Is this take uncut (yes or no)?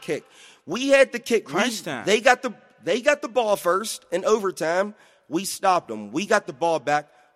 yes